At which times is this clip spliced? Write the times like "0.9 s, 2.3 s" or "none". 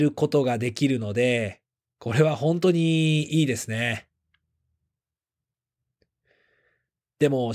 1.8 s